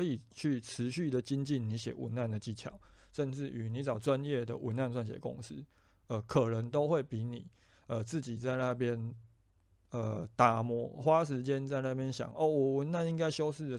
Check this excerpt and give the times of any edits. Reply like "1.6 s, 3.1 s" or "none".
none